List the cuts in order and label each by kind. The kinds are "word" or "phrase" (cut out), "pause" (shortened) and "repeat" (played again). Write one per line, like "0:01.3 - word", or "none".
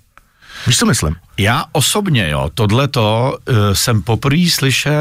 none